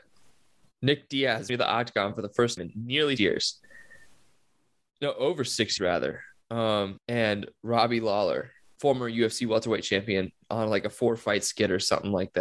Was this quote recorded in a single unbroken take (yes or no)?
no